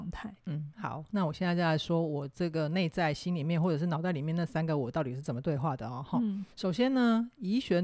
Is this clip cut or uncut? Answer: cut